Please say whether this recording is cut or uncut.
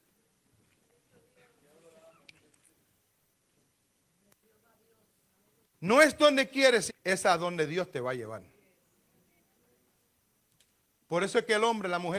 cut